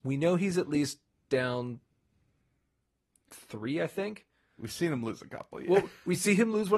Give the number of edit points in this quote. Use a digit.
0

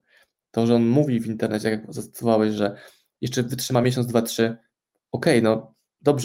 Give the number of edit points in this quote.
0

